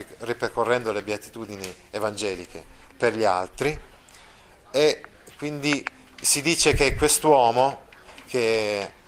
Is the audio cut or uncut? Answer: uncut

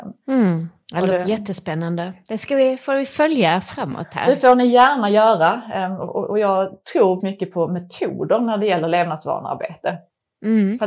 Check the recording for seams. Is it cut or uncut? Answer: cut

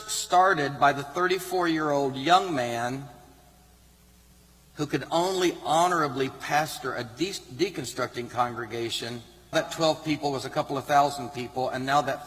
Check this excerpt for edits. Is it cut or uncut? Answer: cut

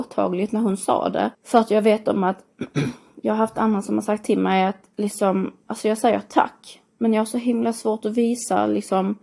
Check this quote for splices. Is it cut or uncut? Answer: cut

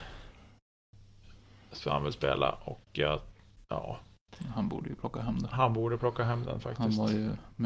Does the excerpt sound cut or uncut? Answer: uncut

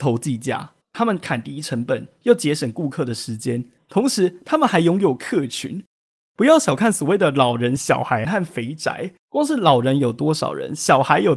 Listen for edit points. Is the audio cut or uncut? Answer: uncut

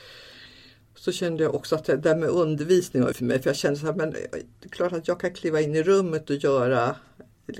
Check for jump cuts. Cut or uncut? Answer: cut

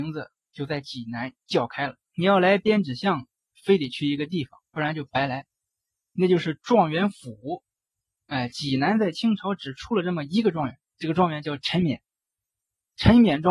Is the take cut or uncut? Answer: cut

